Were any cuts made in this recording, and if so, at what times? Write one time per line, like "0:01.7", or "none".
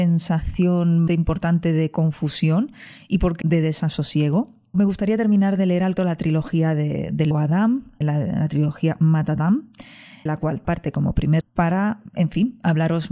0:01.1
0:03.4
0:04.7
0:06.0
0:07.3
0:08.0
0:10.3
0:10.6
0:11.4